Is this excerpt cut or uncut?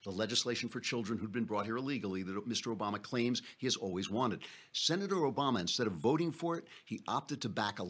uncut